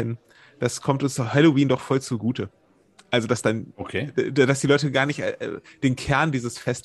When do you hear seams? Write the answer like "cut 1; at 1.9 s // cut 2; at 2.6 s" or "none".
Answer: none